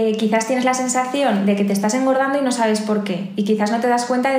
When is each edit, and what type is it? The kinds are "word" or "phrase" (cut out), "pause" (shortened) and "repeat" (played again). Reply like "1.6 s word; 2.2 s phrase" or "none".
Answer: none

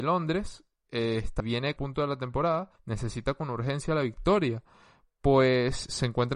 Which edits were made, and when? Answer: 1.4 s phrase; 1.8 s phrase; 2.8 s pause

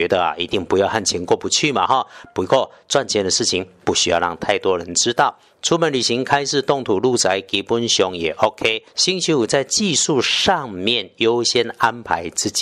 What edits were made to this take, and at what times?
8.9 s pause

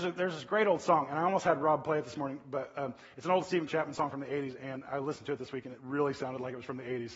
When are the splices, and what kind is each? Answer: 3.7 s word

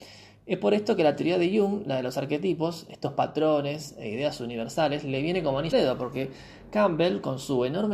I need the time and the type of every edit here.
5.7 s word

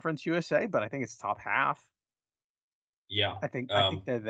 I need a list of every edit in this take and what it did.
none

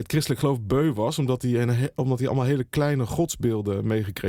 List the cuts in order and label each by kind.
none

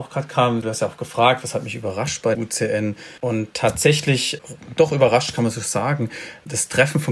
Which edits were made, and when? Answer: 2.3 s word; 3.2 s pause

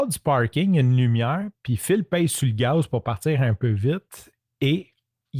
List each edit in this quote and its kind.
none

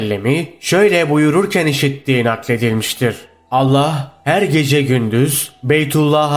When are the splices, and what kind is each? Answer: none

